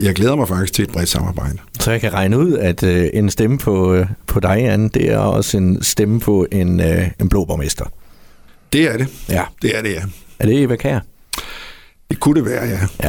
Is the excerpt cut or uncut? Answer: uncut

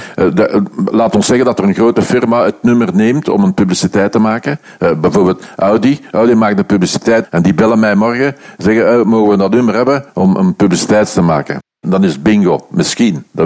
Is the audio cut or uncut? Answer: cut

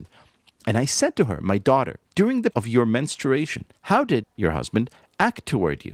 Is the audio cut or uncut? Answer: cut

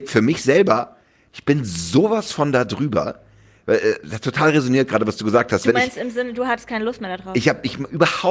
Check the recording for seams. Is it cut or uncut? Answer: uncut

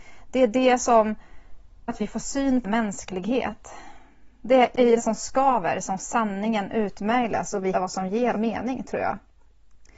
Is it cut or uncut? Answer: cut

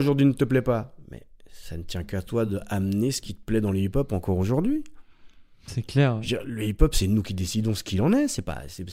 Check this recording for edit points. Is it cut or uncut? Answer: uncut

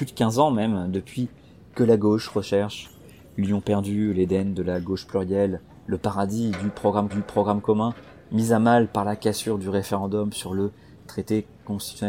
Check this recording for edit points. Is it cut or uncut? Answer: cut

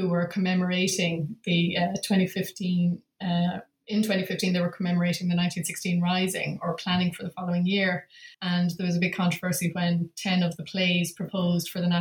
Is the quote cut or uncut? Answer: cut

